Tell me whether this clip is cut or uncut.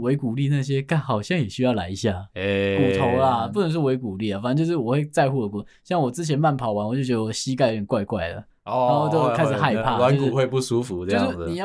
uncut